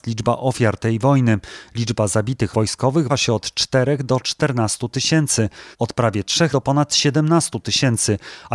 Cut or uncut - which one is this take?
cut